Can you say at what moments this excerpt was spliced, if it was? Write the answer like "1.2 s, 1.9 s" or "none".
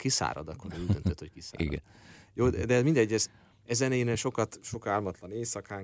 none